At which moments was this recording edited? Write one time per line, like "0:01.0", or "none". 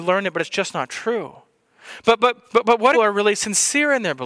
0:02.5
0:02.9